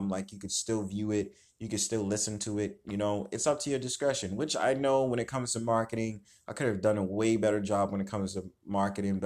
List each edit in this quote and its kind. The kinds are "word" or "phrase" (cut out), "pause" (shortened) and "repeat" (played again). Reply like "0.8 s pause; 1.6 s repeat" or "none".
none